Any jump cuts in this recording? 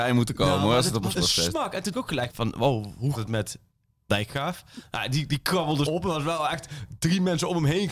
yes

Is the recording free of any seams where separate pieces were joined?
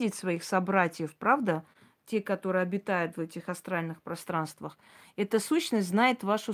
yes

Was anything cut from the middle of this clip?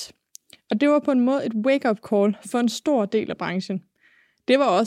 no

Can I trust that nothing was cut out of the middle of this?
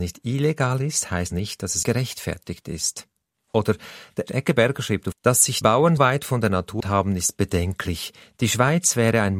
no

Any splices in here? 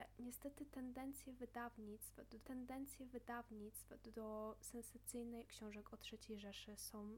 yes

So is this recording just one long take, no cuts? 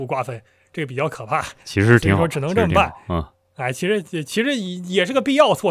no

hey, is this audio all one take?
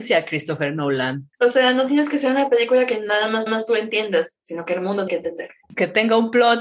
no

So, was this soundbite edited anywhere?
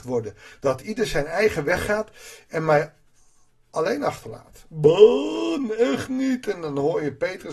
no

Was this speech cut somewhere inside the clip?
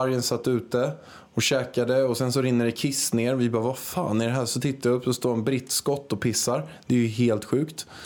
no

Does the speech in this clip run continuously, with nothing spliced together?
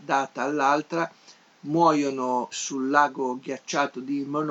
no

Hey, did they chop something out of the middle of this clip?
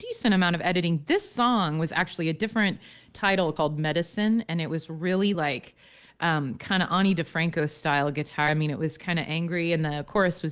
no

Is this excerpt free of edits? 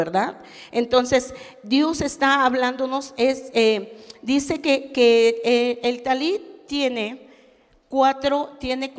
yes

